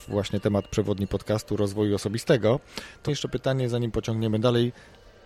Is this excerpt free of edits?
no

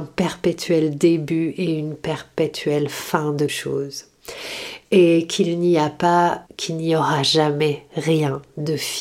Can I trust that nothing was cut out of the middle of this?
no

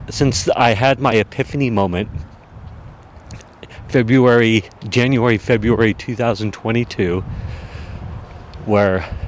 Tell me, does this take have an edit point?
no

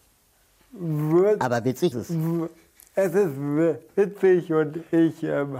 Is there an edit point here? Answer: yes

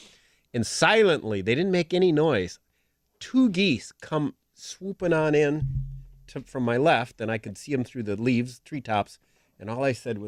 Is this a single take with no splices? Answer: yes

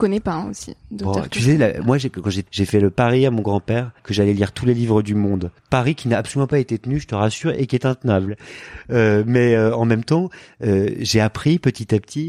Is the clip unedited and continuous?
no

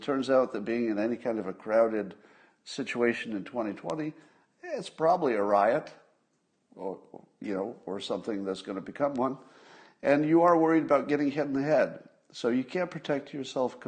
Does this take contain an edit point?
no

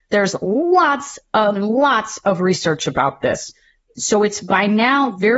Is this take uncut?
yes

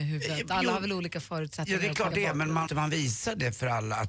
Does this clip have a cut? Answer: yes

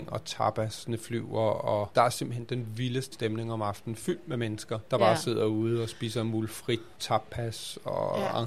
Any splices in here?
yes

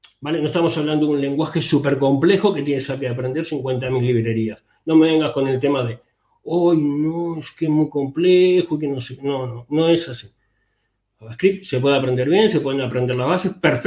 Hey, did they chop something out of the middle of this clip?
no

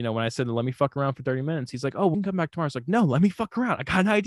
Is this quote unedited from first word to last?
no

